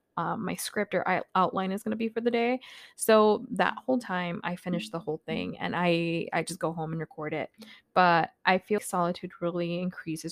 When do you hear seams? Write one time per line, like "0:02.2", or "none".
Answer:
0:08.8